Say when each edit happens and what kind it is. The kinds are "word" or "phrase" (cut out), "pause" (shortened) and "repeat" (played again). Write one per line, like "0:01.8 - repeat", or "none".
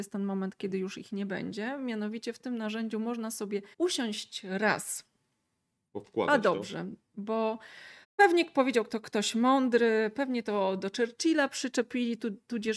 0:03.7 - pause
0:08.0 - pause

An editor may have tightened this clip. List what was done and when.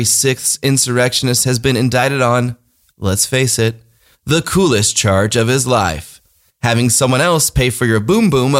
none

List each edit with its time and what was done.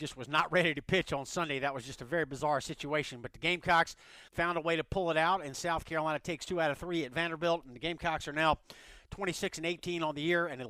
0:04.3 - pause

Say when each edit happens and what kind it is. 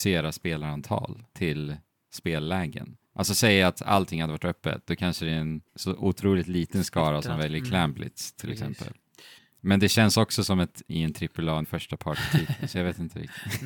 0:01.3 - pause
0:03.0 - pause
0:05.7 - pause
0:09.4 - pause
0:10.9 - word
0:11.6 - word

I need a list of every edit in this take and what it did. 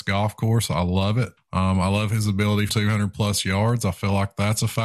0:01.4 - pause
0:02.7 - word

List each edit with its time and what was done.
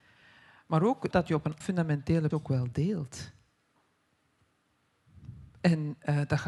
0:01.1 - word
0:01.6 - word
0:02.3 - word

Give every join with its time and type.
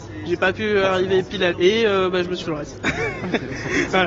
0:01.5 - word
0:02.4 - word

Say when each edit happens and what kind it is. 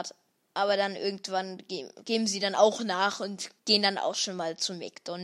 0:03.6 - pause

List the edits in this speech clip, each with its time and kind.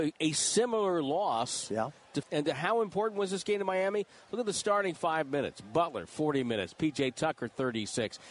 0:02.2 - word

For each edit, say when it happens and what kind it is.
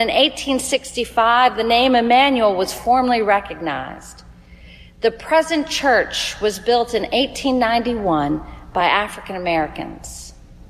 none

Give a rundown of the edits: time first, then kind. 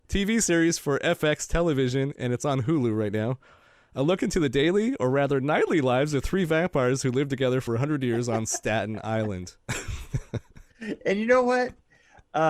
0:07.7 - word

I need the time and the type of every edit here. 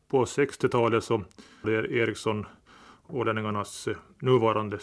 0:01.6 - phrase

